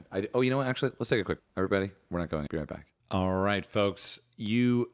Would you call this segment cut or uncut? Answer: cut